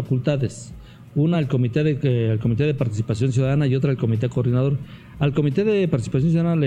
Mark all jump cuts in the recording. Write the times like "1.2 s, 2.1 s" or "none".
none